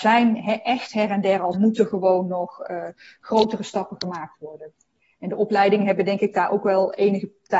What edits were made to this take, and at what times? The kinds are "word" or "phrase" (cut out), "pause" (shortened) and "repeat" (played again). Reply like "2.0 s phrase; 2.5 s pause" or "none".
1.5 s phrase